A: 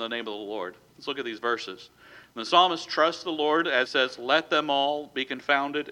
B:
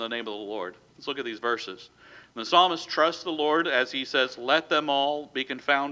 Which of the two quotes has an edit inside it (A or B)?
A